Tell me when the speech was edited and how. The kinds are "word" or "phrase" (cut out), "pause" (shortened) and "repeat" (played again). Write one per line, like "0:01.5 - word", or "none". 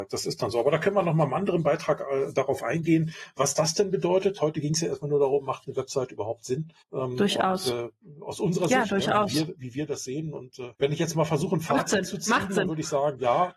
0:06.8 - pause
0:10.7 - pause